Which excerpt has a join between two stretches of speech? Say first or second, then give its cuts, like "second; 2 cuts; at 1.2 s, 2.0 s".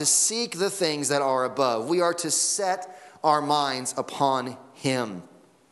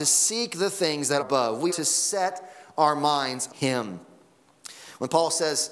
second; 3 cuts; at 1.2 s, 1.7 s, 3.5 s